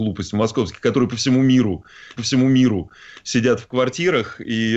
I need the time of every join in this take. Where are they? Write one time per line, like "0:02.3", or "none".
0:02.2